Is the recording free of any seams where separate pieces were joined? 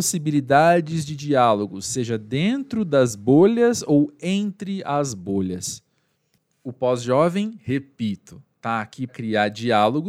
no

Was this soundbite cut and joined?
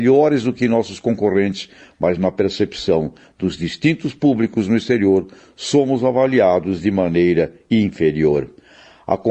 no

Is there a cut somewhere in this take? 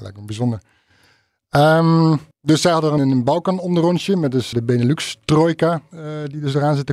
yes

